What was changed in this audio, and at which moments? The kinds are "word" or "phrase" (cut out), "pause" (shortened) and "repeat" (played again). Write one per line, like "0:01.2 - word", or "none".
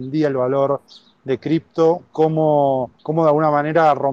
0:03.0 - pause